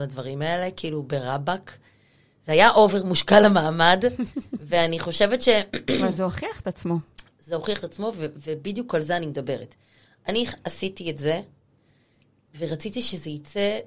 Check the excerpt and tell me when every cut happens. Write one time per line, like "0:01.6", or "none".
none